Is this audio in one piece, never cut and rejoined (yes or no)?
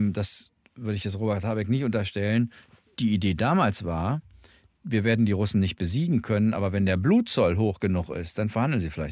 yes